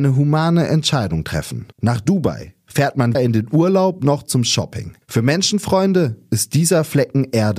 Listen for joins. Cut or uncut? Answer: cut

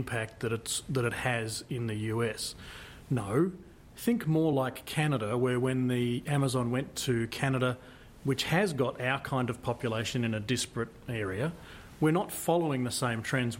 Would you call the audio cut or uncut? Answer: uncut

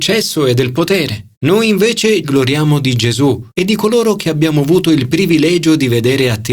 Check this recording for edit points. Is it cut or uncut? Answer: cut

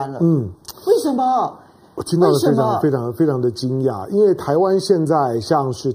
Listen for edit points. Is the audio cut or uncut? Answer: uncut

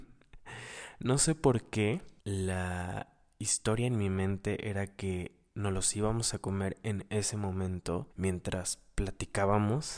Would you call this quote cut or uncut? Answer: uncut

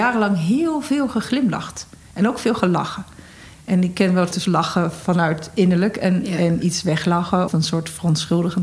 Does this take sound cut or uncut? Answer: cut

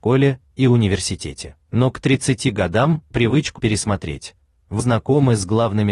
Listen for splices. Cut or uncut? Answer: cut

